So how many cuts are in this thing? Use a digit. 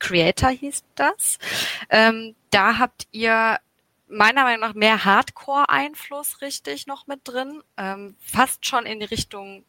0